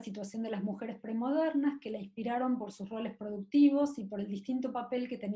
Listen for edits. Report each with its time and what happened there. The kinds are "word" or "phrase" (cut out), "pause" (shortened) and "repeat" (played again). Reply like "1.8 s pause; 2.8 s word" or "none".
none